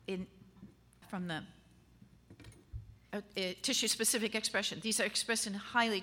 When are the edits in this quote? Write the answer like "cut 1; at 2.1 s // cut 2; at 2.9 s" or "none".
cut 1; at 1.0 s // cut 2; at 3.1 s

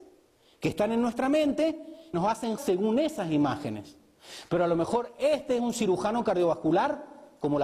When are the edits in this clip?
cut 1; at 2.1 s // cut 2; at 2.6 s

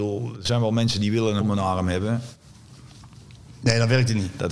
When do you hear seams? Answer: cut 1; at 1.4 s

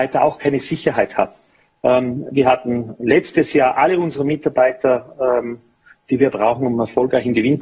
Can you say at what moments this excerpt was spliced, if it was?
none

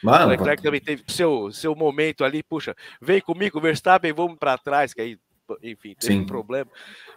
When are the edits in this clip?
cut 1; at 1.1 s // cut 2; at 4.4 s

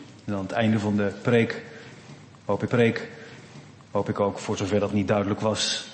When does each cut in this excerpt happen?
cut 1; at 2.7 s // cut 2; at 4.9 s

